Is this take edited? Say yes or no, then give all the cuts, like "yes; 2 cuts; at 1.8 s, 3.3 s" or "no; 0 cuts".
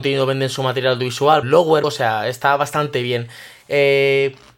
yes; 2 cuts; at 1.4 s, 1.8 s